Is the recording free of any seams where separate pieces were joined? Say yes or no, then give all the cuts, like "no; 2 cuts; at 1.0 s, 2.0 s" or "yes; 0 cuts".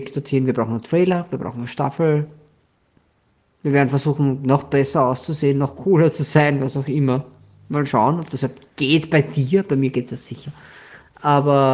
yes; 0 cuts